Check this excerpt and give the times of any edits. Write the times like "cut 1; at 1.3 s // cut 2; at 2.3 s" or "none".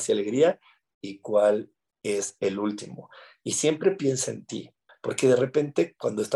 cut 1; at 4.9 s

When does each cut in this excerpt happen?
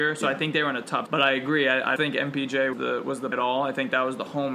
cut 1; at 1.1 s // cut 2; at 2.0 s // cut 3; at 2.7 s // cut 4; at 3.3 s

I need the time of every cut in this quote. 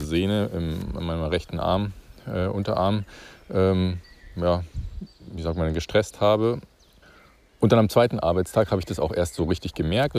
cut 1; at 7.0 s

